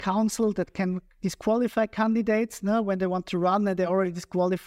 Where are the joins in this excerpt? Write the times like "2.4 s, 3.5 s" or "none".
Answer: none